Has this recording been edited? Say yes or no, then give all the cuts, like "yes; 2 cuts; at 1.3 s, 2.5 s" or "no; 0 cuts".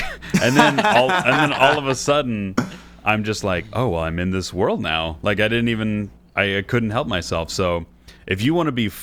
no; 0 cuts